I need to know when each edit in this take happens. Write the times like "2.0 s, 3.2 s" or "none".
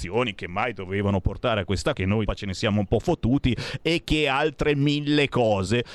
1.9 s, 2.3 s